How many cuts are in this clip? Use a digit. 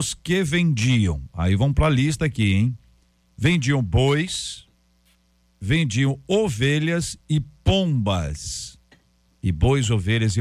0